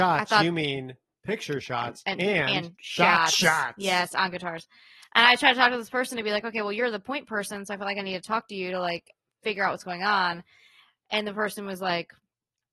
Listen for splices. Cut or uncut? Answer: uncut